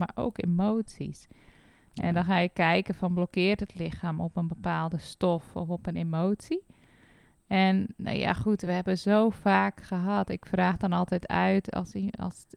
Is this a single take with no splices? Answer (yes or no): yes